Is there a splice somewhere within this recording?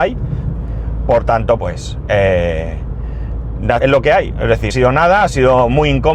yes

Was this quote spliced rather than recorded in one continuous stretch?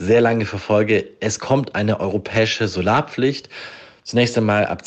no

